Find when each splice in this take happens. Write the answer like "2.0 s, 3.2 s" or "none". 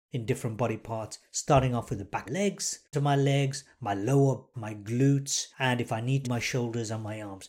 2.3 s, 2.9 s, 4.5 s, 5.5 s, 6.2 s